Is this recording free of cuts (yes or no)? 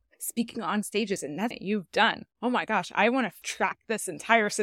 no